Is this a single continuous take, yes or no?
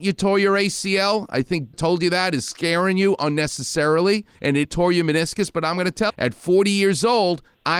no